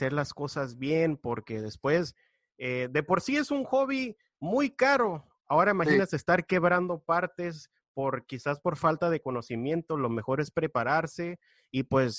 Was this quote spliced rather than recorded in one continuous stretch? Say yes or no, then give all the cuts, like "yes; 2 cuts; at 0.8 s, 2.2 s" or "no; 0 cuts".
no; 0 cuts